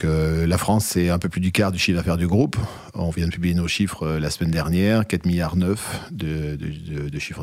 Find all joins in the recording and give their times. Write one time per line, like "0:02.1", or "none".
none